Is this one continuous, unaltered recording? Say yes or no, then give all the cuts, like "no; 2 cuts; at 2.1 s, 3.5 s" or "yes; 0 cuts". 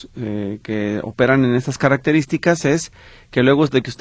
yes; 0 cuts